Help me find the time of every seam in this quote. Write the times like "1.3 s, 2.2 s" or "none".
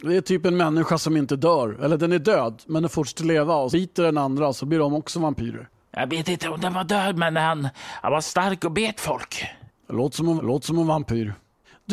3.7 s, 10.4 s